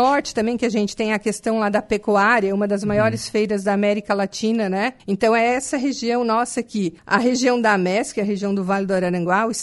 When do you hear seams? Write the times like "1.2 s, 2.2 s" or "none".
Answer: 5.0 s, 7.0 s

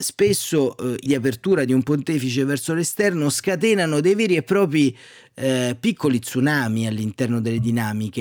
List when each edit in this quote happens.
1.1 s

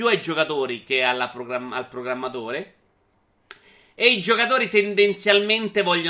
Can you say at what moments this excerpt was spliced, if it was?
none

